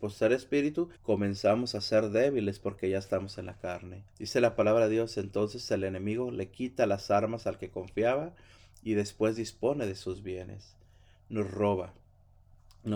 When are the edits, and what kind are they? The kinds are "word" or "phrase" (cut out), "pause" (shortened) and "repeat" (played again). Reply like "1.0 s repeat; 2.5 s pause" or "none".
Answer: 0.9 s pause; 4.1 s pause